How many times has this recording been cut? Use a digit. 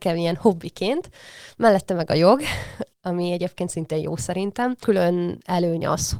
1